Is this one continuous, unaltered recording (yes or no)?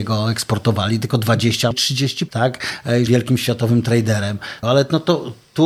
no